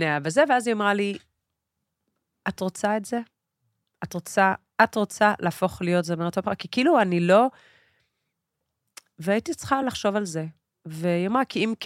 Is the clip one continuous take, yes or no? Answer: yes